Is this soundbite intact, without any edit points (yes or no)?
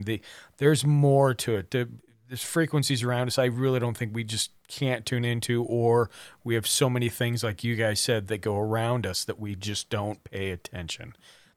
yes